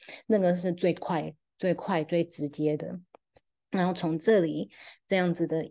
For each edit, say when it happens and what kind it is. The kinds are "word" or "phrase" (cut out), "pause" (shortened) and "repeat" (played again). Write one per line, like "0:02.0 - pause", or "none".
none